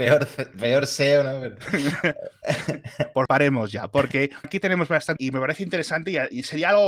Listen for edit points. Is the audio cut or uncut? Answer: cut